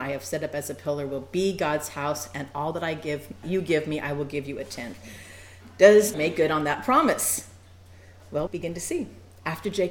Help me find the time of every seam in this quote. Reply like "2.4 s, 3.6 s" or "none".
3.4 s, 6.1 s, 8.5 s

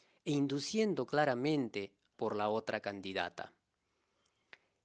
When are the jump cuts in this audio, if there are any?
2.1 s

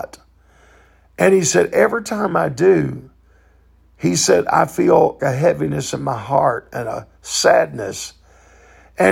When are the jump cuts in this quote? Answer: 5.2 s

